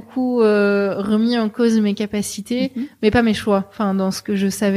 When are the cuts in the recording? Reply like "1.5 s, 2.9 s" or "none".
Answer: none